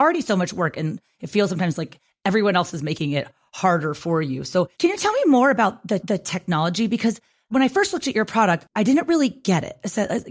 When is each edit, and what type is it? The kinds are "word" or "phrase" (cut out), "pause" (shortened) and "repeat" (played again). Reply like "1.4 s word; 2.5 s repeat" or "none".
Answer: 4.7 s pause; 6.0 s repeat